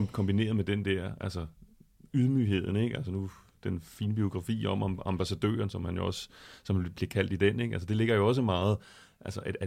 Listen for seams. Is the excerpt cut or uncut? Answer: uncut